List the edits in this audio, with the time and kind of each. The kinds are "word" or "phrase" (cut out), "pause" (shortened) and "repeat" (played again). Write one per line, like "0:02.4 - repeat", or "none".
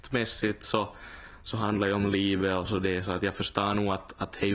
none